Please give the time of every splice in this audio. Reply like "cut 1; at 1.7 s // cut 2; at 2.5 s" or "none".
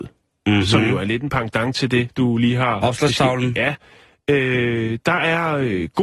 none

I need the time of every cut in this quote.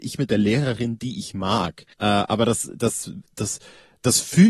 cut 1; at 1.9 s

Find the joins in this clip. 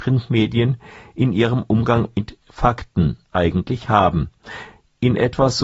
none

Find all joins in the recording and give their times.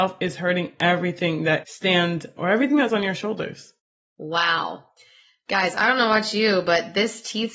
cut 1; at 1.6 s // cut 2; at 2.4 s // cut 3; at 2.9 s

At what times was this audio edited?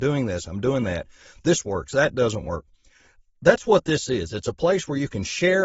none

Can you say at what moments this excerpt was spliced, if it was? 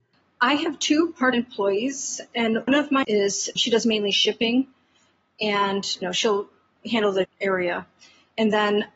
cut 1; at 1.3 s // cut 2; at 2.7 s // cut 3; at 3.0 s // cut 4; at 3.6 s // cut 5; at 6.0 s // cut 6; at 6.8 s // cut 7; at 7.2 s

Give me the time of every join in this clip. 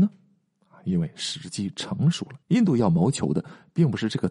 cut 1; at 2.4 s

